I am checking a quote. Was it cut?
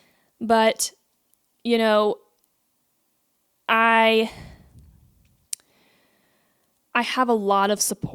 no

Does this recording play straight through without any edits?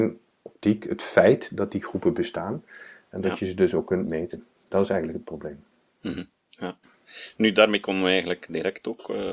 yes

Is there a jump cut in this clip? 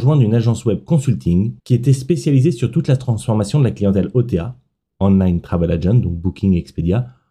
yes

